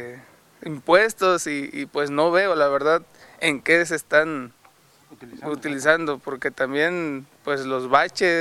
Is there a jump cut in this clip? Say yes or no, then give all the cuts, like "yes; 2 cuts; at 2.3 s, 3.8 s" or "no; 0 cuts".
no; 0 cuts